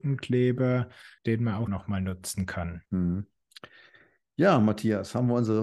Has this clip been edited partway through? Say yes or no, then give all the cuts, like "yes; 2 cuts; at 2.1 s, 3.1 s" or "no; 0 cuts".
yes; 3 cuts; at 1.2 s, 1.7 s, 2.9 s